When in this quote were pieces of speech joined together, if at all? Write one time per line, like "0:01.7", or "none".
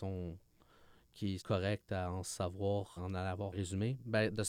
0:01.4
0:03.0
0:03.5